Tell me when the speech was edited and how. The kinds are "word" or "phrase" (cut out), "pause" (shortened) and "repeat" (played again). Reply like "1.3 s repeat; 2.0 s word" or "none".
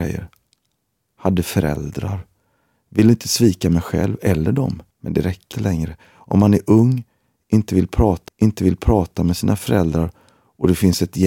4.9 s pause; 5.5 s word; 8.3 s repeat